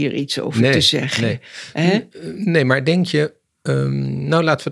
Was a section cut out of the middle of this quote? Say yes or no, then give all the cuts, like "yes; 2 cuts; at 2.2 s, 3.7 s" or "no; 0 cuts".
no; 0 cuts